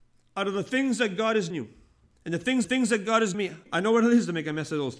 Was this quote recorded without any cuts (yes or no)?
no